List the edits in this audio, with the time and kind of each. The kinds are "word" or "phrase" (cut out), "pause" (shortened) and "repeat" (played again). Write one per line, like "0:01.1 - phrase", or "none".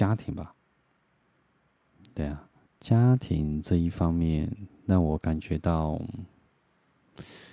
0:02.7 - pause

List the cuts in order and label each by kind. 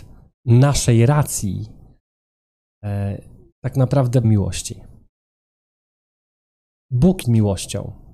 0:04.2 - word
0:07.2 - word

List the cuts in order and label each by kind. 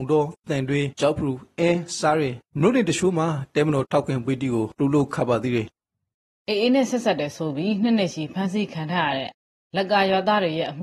none

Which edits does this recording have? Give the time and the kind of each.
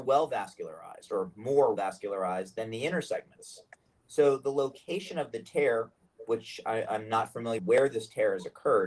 0:01.8 - word
0:07.6 - word

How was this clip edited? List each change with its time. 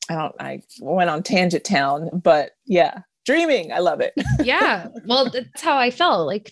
0:02.1 - word
0:05.5 - word

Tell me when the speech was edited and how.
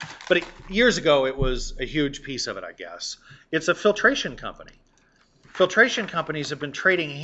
none

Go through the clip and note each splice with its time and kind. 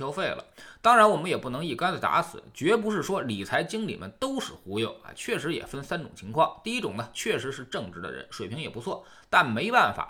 none

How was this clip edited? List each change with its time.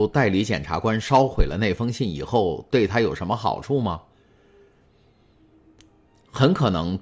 none

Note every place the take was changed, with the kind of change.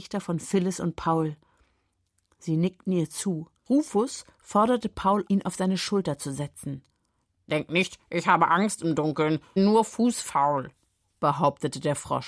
0:03.6 - pause
0:05.3 - word
0:09.6 - word

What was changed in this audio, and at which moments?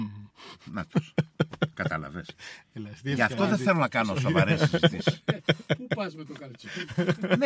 none

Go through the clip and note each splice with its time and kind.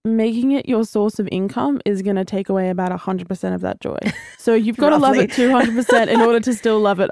0:04.3 - pause

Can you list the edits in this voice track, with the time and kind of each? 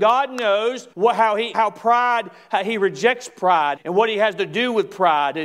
0:00.9 - pause
0:01.5 - word
0:03.8 - word

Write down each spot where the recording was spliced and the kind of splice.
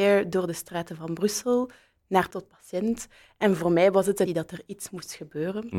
0:02.3 - word
0:04.3 - word

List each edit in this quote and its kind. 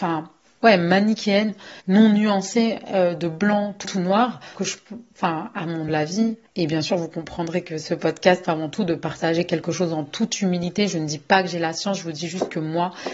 0:01.8 - pause
0:03.8 - word
0:04.5 - word
0:05.9 - word
0:06.5 - pause
0:08.4 - phrase

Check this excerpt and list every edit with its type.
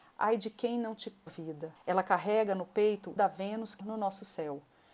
0:01.3 - phrase
0:01.8 - pause
0:03.2 - word
0:03.8 - word

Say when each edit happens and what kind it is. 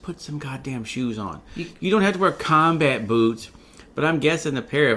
none

